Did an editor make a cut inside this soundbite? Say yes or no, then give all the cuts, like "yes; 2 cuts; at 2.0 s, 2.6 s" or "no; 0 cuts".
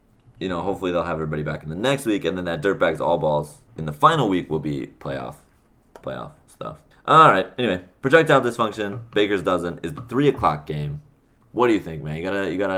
yes; 3 cuts; at 3.7 s, 6.0 s, 6.9 s